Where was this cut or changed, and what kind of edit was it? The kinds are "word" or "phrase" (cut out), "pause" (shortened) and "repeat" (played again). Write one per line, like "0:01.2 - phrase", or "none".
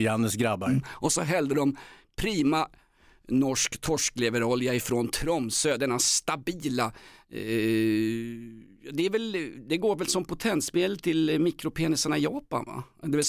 none